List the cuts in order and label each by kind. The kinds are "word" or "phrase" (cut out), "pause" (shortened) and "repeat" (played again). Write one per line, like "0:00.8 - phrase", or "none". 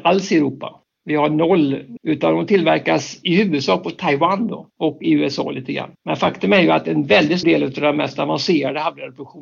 0:02.0 - word
0:04.7 - pause
0:06.0 - pause
0:07.4 - word